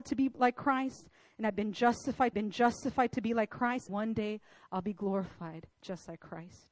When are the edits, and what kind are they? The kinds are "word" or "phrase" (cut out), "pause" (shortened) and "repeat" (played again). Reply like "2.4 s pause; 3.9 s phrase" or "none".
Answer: 2.3 s repeat; 3.9 s word; 5.7 s pause